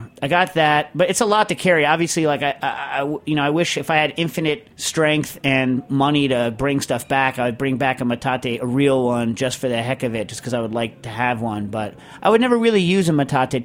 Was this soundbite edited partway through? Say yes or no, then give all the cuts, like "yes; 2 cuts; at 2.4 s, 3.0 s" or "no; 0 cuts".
yes; 1 cut; at 4.7 s